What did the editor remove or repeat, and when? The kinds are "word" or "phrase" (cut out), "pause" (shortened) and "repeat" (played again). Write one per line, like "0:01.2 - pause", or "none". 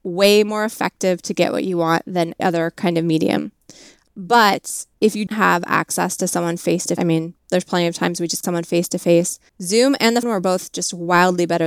0:02.4 - word
0:04.9 - pause
0:05.3 - word
0:07.0 - phrase
0:07.4 - pause
0:08.4 - phrase
0:09.5 - pause
0:10.2 - word